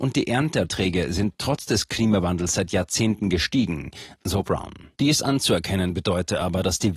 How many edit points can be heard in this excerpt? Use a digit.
1